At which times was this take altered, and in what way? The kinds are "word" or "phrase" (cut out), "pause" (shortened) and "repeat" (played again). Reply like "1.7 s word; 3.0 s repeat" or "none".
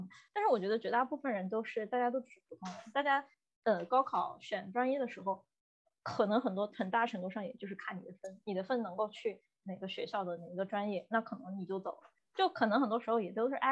none